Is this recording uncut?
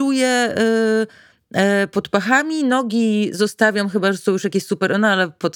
yes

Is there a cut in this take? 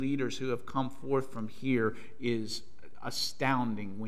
no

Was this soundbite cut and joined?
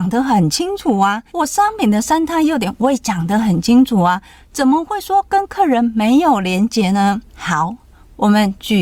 yes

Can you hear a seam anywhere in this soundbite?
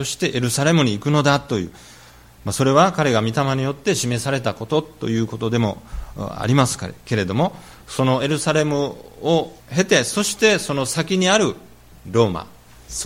yes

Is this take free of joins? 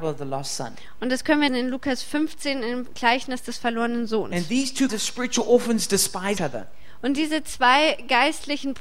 no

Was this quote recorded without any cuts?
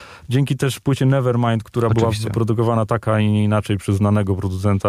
yes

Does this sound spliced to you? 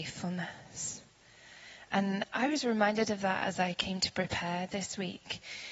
no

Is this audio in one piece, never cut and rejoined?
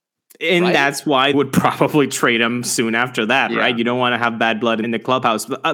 no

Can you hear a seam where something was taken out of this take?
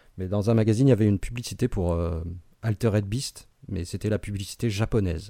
no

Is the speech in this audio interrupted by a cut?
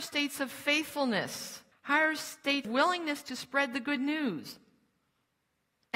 yes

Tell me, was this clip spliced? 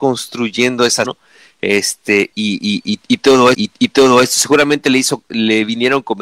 yes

